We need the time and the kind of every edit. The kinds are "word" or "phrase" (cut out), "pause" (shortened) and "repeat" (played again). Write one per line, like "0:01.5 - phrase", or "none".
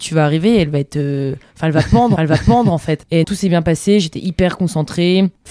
0:02.2 - repeat
0:03.2 - word